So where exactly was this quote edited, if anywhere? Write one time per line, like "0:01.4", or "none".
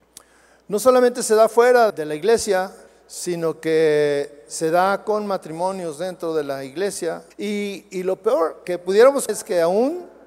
0:01.9
0:02.9
0:07.3
0:08.6
0:09.3

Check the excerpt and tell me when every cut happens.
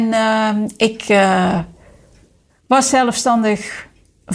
none

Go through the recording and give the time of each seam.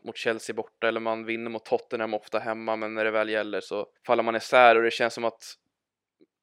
0:04.0

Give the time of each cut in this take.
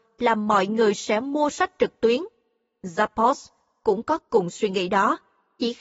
none

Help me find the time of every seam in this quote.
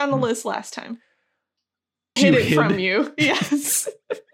0:02.2

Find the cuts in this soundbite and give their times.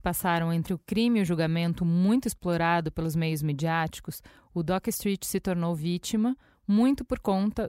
none

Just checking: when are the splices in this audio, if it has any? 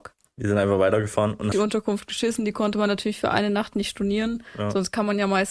0:01.5

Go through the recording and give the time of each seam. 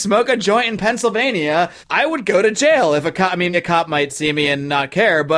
0:01.8
0:03.5

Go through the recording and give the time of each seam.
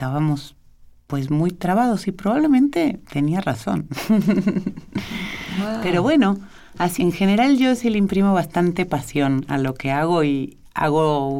0:03.0
0:07.0

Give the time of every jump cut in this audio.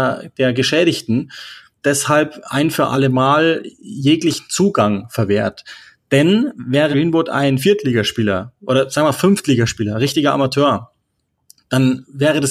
0:01.8
0:06.9

